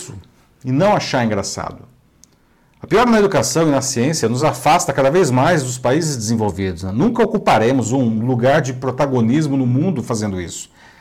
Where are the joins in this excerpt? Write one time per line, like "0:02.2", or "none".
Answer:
none

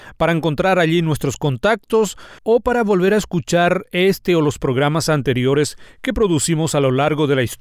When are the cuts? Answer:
0:02.4

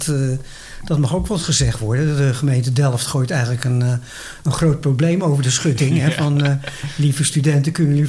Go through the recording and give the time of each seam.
none

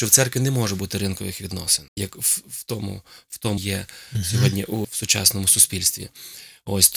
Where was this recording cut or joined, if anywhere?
0:01.9
0:03.6
0:04.8

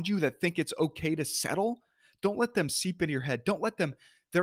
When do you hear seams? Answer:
none

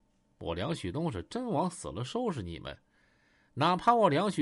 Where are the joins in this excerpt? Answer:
none

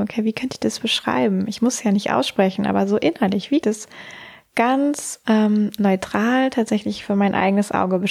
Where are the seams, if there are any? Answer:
0:03.6

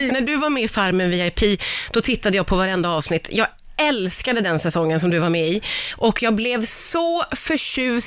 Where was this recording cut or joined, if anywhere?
none

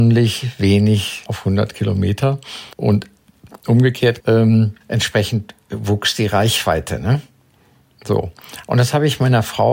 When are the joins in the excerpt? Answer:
0:01.3
0:02.7
0:04.2
0:04.8

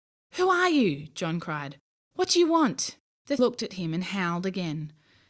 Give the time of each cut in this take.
0:03.4

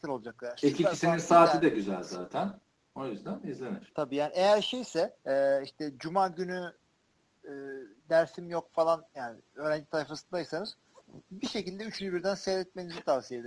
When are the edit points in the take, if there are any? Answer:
0:05.2
0:09.1

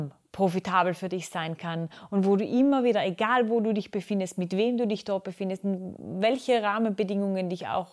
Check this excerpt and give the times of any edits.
none

